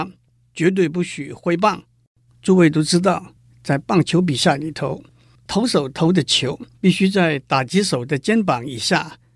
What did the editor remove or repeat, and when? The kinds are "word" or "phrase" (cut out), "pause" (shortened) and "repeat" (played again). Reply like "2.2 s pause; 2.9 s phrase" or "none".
6.7 s pause